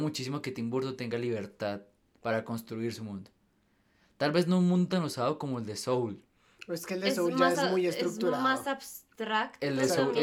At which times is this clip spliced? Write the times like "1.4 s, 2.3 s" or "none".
none

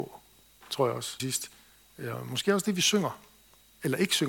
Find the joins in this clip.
1.2 s

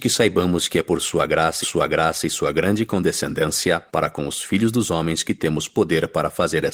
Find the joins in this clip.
1.6 s, 3.9 s

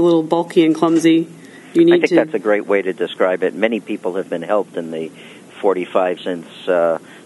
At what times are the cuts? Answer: 6.2 s

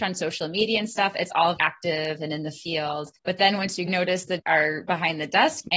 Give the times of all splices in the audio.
1.6 s, 3.2 s, 3.9 s, 4.4 s

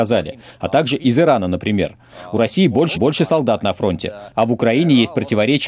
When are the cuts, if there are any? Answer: 2.9 s

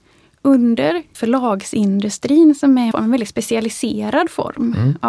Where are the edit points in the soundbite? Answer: 1.1 s, 2.9 s

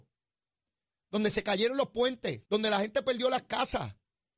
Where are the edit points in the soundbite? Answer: 2.5 s

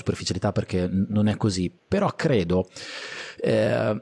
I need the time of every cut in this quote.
1.8 s

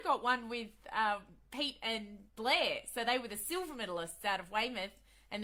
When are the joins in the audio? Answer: 2.3 s

